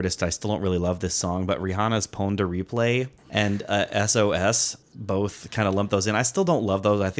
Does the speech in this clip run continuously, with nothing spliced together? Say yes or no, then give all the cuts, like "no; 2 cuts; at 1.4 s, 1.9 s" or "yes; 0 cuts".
no; 2 cuts; at 3.2 s, 4.8 s